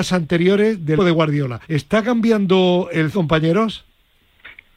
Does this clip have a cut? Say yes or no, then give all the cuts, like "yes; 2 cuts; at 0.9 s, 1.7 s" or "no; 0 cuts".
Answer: yes; 3 cuts; at 1.0 s, 1.6 s, 3.1 s